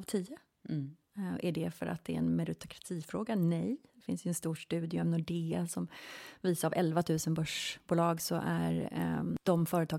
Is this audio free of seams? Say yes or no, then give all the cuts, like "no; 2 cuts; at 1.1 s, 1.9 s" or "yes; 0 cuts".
yes; 0 cuts